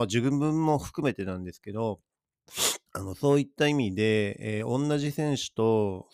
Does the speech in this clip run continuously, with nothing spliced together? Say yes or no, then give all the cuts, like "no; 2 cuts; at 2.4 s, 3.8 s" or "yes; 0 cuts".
no; 1 cut; at 2.9 s